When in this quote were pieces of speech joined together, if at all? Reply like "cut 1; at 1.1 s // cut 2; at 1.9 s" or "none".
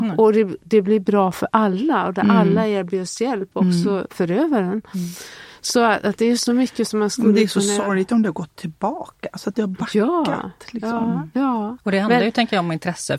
none